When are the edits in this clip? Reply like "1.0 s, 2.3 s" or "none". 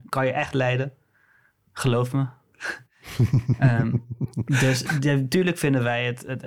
none